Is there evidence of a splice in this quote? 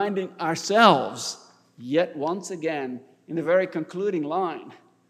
no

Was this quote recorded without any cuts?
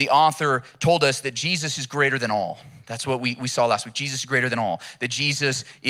yes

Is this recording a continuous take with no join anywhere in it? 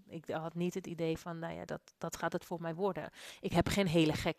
yes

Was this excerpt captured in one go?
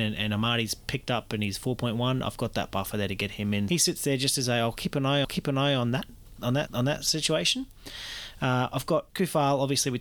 no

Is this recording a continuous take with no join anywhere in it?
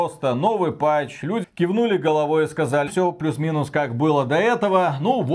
no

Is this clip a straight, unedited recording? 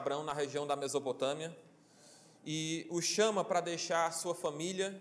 yes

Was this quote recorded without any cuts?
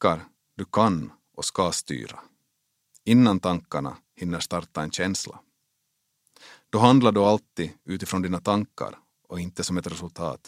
yes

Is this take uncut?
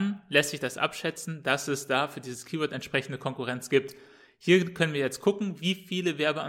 yes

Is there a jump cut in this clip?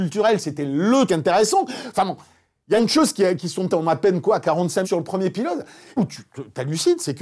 yes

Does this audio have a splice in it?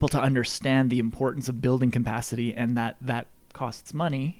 no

